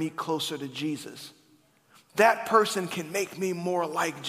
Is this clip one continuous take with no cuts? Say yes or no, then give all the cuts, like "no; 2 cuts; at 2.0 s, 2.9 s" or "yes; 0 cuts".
yes; 0 cuts